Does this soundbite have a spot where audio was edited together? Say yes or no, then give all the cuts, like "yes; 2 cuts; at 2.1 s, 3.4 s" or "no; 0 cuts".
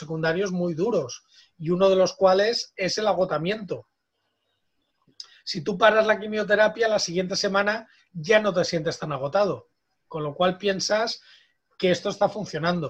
no; 0 cuts